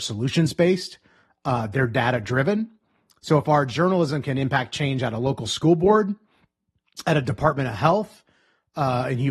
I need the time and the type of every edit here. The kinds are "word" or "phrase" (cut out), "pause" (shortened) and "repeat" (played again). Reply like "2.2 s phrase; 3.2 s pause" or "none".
none